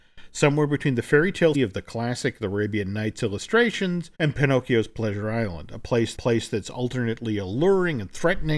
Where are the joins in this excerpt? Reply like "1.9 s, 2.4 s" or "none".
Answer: 1.5 s, 4.1 s, 6.1 s